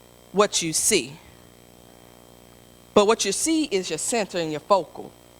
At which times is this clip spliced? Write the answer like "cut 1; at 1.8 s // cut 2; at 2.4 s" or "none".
none